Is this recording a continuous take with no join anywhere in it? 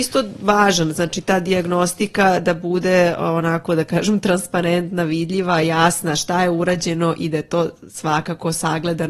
yes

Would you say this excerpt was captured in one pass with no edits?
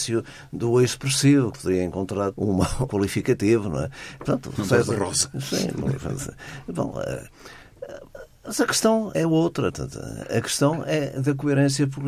no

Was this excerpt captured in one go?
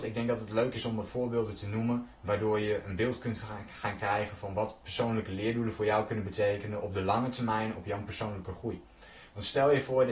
yes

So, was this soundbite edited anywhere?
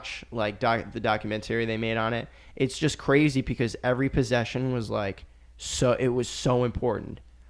no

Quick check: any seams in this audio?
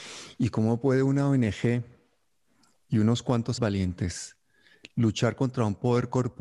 yes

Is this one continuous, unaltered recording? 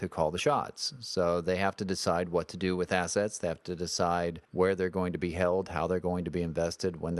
no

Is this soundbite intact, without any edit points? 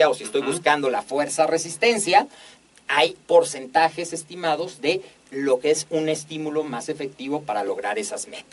yes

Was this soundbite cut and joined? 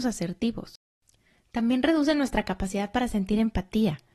no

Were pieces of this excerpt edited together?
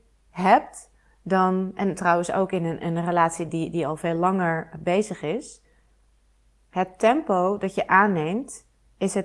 no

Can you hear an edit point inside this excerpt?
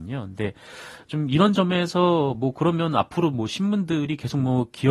no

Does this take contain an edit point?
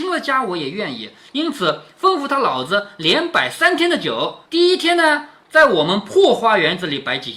yes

